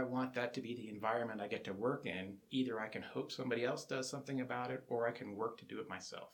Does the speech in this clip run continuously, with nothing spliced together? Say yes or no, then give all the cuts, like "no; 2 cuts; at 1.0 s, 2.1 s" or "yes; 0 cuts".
yes; 0 cuts